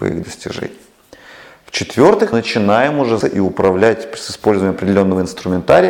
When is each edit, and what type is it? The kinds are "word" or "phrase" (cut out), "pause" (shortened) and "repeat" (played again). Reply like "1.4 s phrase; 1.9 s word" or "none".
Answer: 2.3 s word; 3.2 s word

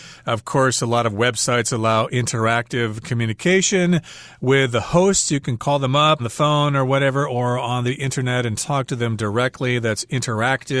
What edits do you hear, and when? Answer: 6.2 s word

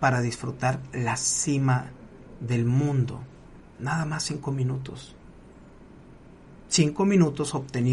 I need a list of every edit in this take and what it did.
none

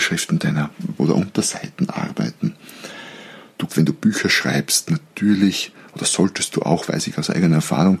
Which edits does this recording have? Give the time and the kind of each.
1.0 s word; 3.7 s word

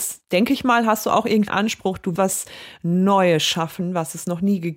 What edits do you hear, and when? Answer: 1.5 s word; 2.2 s word

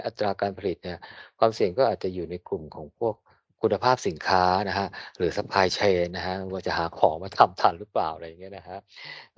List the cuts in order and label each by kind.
none

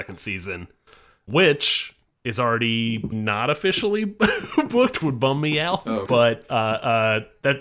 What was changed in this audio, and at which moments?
1.3 s word; 3.1 s word; 5.0 s word; 6.1 s word

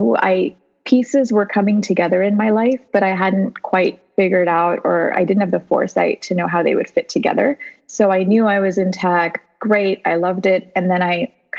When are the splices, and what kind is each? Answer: none

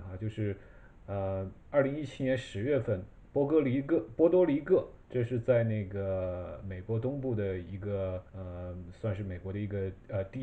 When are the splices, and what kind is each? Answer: 1.6 s pause; 5.0 s pause; 8.3 s pause

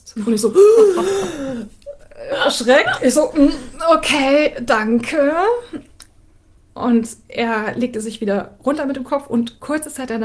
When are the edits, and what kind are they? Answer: none

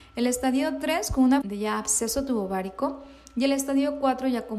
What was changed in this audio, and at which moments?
1.4 s word

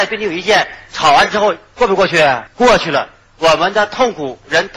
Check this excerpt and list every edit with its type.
2.5 s pause

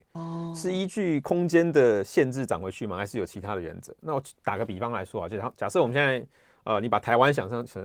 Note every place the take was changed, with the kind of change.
none

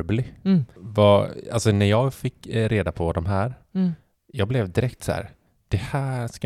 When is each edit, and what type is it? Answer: none

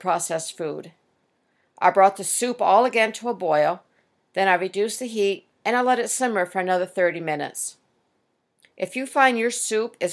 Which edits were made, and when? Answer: none

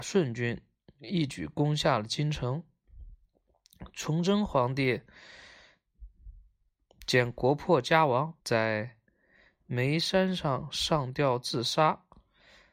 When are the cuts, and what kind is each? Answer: 8.4 s pause

